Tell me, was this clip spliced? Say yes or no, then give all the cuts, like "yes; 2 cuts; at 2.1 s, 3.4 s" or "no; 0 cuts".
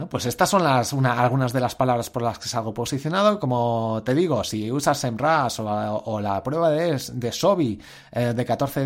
no; 0 cuts